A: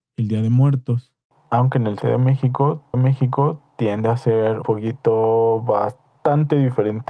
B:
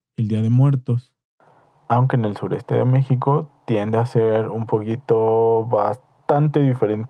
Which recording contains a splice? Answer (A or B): A